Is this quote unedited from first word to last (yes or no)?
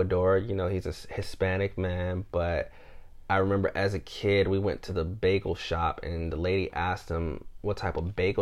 yes